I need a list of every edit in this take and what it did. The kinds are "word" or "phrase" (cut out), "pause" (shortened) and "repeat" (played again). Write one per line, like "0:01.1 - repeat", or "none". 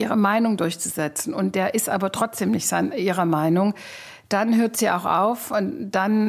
none